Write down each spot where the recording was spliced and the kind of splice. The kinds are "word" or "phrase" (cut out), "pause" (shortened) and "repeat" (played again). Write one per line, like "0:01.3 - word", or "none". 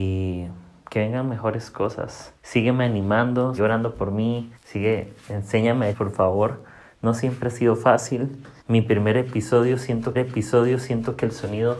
0:02.4 - pause
0:03.6 - word
0:04.5 - pause
0:05.9 - phrase
0:08.6 - pause
0:10.1 - repeat